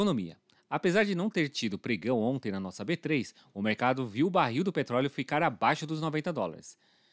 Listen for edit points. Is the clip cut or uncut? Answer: uncut